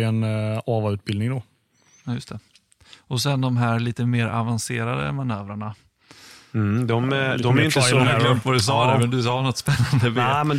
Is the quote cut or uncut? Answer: uncut